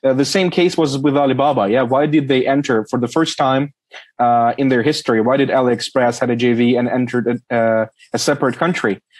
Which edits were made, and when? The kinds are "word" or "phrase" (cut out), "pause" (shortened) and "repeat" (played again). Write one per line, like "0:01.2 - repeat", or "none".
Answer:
none